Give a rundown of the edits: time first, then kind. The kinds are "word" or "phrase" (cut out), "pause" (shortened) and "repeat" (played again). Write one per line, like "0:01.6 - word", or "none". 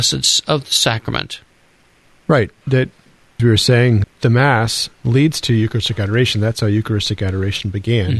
0:02.0 - pause
0:03.4 - word
0:04.0 - word
0:04.9 - pause